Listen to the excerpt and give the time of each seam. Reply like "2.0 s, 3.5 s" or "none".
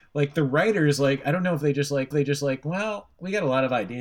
2.1 s